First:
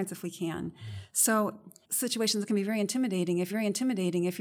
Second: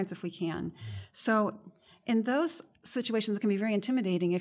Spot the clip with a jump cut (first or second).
first